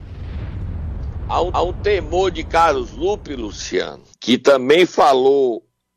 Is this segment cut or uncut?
cut